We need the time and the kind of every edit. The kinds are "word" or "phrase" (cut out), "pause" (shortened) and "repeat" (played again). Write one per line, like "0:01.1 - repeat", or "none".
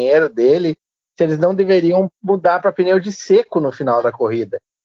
none